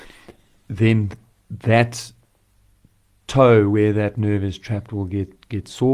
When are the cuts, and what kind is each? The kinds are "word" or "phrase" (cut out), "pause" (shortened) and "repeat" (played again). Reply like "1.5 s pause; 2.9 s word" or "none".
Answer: none